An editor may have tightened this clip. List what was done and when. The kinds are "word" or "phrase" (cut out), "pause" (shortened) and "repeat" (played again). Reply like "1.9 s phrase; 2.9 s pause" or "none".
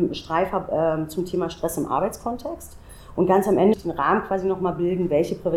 3.7 s word